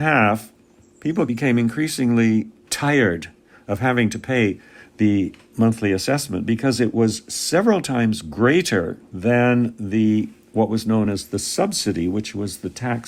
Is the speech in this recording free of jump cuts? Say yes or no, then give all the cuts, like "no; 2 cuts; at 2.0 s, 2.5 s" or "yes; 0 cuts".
yes; 0 cuts